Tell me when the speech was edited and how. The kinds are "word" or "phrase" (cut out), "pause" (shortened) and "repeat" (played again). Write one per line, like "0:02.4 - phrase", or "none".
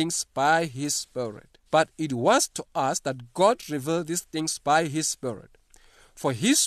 0:01.7 - pause

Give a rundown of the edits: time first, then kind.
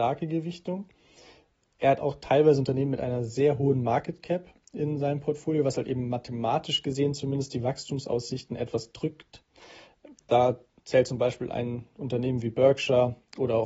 none

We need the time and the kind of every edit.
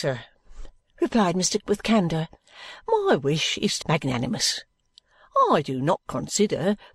0:01.6 - word
0:03.8 - word

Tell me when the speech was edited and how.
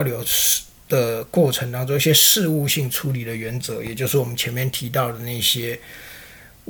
none

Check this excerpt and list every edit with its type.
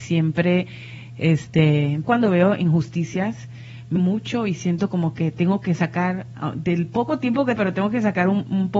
0:02.0 - word
0:04.0 - word
0:07.6 - word

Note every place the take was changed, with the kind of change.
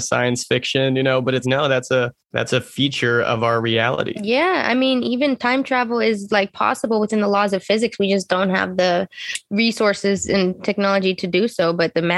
0:01.4 - word
0:02.2 - pause

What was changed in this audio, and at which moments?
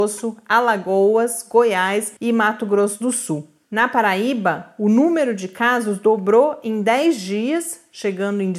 0:02.2 - pause

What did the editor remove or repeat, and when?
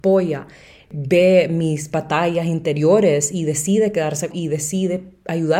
0:04.3 - word

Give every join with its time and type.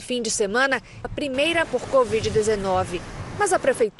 0:01.0 - word
0:01.6 - word

